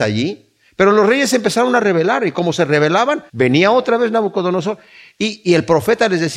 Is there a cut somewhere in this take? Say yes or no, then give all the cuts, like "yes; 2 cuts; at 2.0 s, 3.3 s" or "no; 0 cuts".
yes; 1 cut; at 3.3 s